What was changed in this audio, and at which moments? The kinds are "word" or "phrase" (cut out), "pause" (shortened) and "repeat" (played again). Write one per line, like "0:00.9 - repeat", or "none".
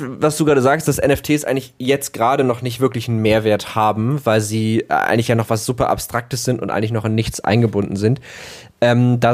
none